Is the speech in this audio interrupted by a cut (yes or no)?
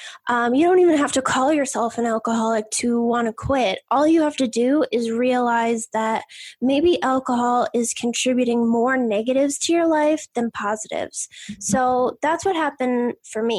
no